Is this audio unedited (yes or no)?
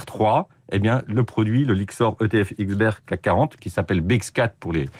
yes